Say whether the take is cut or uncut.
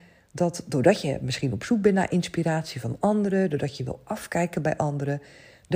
uncut